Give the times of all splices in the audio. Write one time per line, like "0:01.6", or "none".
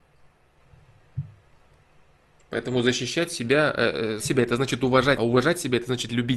0:04.2
0:05.2